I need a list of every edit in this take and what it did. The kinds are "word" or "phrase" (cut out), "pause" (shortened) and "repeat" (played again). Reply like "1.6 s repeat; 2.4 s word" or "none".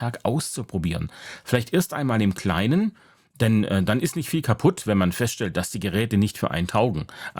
none